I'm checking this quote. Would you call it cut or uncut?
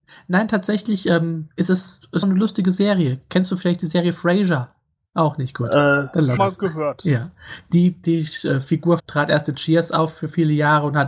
cut